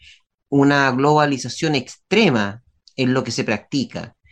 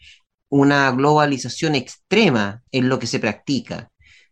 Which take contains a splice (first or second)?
second